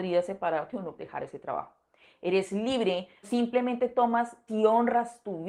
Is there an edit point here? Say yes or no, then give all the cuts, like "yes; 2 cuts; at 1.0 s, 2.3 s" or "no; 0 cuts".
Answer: yes; 3 cuts; at 1.0 s, 3.2 s, 4.5 s